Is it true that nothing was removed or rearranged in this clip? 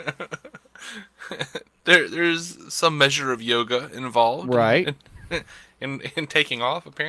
yes; 0 cuts

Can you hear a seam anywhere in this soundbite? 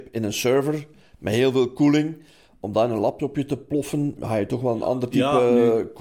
yes; 1 cut; at 4.2 s

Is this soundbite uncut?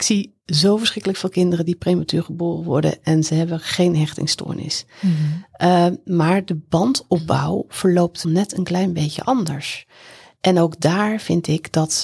no; 1 cut; at 8.2 s

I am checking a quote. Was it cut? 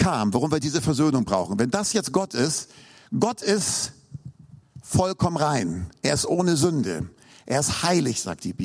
no; 0 cuts

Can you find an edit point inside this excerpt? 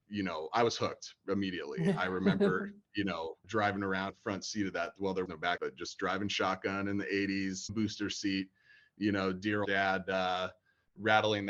yes; 6 cuts; at 3.4 s, 4.1 s, 5.3 s, 5.6 s, 7.7 s, 9.7 s

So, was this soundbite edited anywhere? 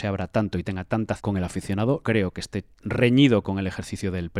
yes; 3 cuts; at 1.2 s, 2.0 s, 2.7 s

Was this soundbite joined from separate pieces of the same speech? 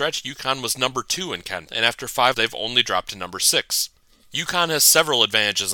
yes; 2 cuts; at 1.7 s, 2.3 s

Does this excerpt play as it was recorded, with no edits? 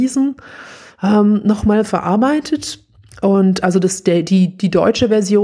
yes; 0 cuts

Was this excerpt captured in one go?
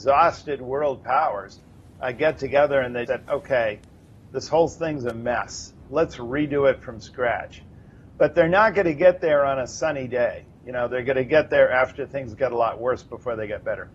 no; 1 cut; at 3.1 s

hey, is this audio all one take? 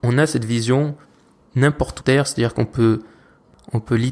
no; 1 cut; at 2.0 s

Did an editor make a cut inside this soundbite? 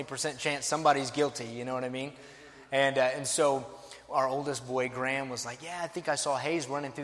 no; 0 cuts

